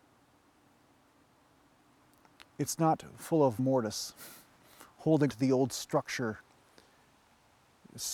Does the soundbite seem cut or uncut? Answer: cut